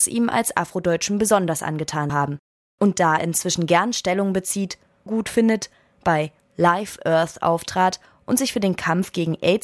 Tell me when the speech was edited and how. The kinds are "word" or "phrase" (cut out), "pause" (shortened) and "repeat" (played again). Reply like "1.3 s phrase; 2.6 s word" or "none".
2.1 s word; 3.2 s word; 5.1 s word